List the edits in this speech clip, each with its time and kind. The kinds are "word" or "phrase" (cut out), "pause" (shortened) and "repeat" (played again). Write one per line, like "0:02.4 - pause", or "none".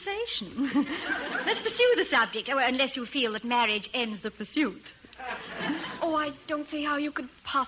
none